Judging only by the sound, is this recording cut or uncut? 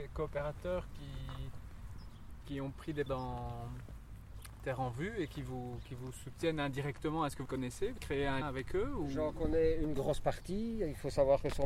cut